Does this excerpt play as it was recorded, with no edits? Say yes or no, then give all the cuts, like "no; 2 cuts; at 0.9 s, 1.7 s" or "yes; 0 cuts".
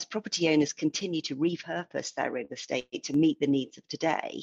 yes; 0 cuts